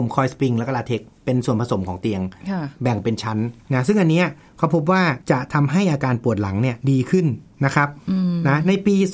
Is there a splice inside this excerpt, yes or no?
yes